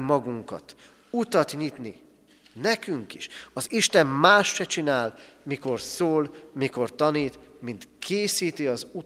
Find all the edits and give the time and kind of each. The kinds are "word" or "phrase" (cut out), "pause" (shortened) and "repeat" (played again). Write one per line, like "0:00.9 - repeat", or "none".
none